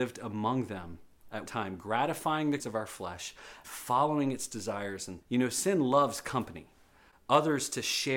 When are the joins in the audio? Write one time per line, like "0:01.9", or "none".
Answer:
0:01.5
0:02.6
0:03.6
0:05.2